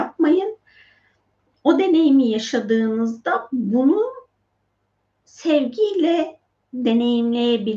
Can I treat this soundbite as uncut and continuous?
yes; 0 cuts

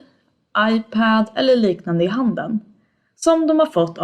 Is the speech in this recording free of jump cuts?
yes; 0 cuts

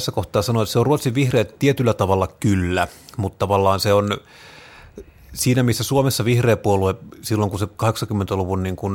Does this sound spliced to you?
no; 0 cuts

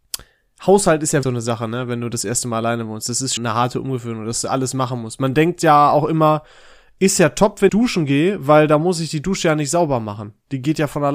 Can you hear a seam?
yes; 3 cuts; at 1.2 s, 3.4 s, 7.7 s

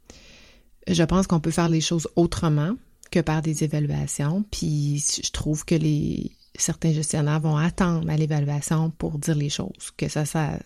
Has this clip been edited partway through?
no; 0 cuts

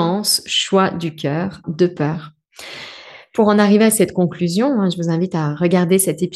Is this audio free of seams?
no; 1 cut; at 1.6 s

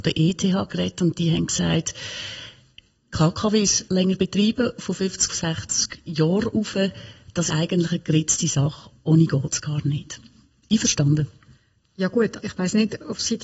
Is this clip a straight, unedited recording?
no; 3 cuts; at 5.3 s, 7.5 s, 12.4 s

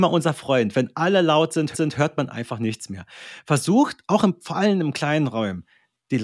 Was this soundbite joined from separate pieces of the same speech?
yes; 1 cut; at 1.7 s

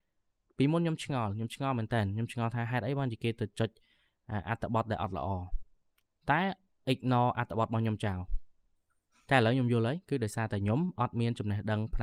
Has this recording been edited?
no; 0 cuts

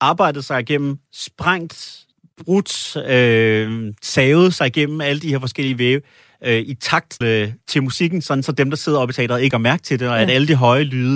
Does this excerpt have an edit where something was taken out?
yes; 2 cuts; at 7.2 s, 9.5 s

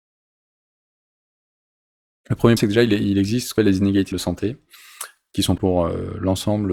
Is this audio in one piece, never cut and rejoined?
no; 4 cuts; at 2.6 s, 3.6 s, 4.1 s, 5.6 s

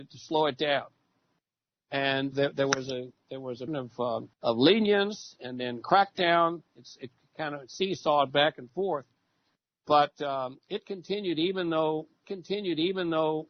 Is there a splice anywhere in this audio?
yes; 4 cuts; at 2.3 s, 3.7 s, 4.3 s, 12.2 s

